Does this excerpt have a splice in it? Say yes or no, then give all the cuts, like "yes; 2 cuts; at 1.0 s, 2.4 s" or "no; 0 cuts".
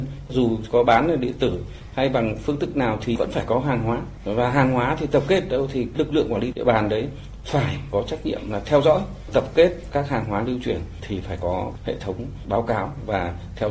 no; 0 cuts